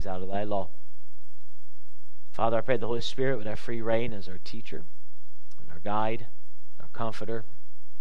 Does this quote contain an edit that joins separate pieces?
no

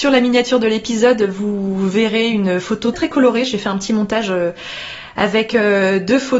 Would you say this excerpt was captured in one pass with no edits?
no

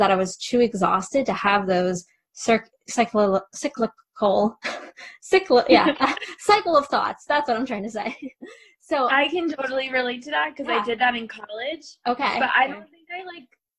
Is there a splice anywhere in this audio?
no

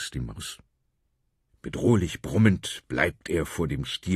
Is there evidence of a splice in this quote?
no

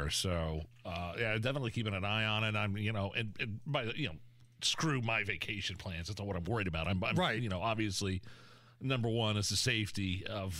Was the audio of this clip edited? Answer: no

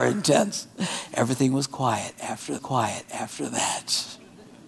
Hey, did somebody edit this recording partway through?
yes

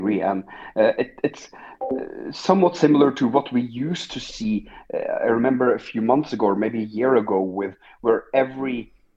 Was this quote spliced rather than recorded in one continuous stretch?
no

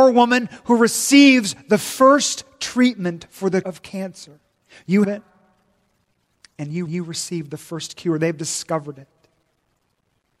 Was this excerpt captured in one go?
no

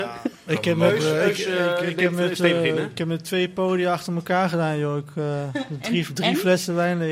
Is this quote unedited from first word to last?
yes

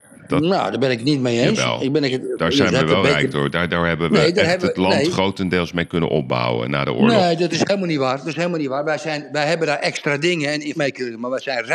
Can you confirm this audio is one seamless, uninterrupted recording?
no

